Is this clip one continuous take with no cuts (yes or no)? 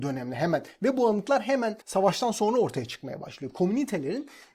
no